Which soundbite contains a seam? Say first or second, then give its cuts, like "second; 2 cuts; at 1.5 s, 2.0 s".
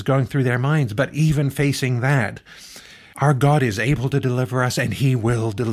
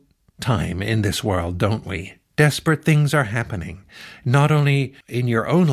second; 1 cut; at 2.2 s